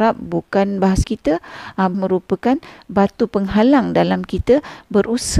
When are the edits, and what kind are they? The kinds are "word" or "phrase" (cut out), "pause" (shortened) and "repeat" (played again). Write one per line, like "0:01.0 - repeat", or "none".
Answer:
0:01.0 - word
0:01.9 - word